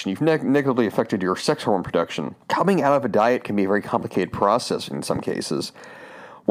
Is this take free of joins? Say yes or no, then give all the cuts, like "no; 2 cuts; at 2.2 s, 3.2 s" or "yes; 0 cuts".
no; 1 cut; at 2.4 s